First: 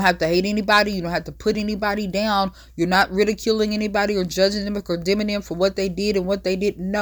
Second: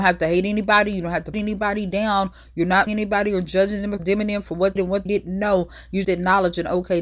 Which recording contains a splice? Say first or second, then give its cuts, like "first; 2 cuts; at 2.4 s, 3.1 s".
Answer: second; 6 cuts; at 1.3 s, 2.9 s, 4.0 s, 4.8 s, 5.1 s, 6.0 s